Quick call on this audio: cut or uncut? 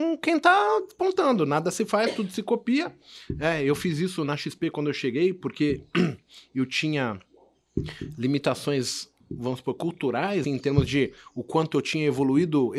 cut